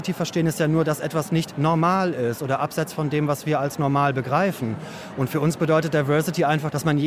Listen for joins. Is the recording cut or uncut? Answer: uncut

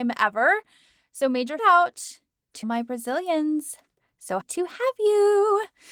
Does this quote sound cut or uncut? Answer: cut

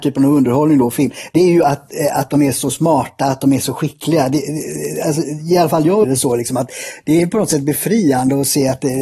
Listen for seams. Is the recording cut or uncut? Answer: cut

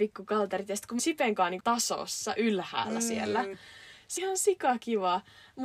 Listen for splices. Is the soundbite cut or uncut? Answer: cut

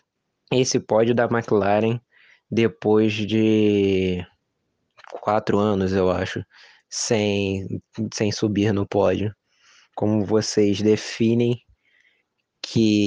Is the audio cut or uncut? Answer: uncut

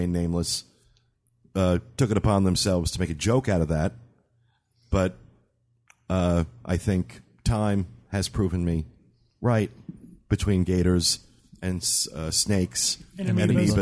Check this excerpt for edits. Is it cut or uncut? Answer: uncut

